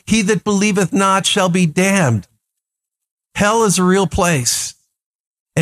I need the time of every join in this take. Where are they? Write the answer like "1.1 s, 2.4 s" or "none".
none